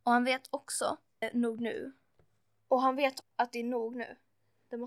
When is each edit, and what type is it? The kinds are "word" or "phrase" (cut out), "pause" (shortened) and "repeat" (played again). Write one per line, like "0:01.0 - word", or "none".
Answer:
0:01.2 - phrase
0:03.2 - word